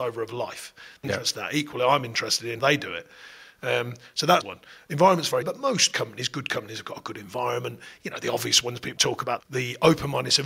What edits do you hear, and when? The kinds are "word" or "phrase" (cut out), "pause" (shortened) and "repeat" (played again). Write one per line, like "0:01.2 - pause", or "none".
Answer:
0:01.0 - word
0:02.6 - word
0:04.4 - word
0:05.4 - word
0:09.0 - word
0:09.4 - word